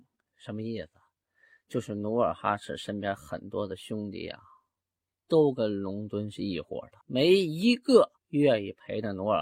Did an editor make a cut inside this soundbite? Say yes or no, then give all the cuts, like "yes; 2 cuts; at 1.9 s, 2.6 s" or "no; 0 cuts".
yes; 2 cuts; at 7.0 s, 8.2 s